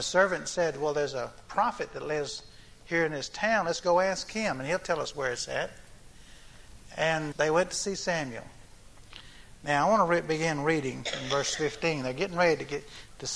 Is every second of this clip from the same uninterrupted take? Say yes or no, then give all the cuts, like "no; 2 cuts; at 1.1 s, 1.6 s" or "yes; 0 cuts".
no; 1 cut; at 7.3 s